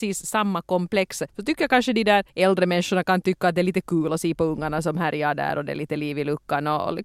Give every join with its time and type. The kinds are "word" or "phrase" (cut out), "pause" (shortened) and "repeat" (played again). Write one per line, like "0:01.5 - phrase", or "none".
0:01.3 - pause
0:02.3 - pause